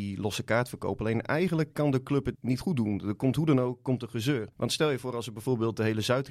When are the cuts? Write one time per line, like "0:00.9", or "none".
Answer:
0:02.4
0:04.5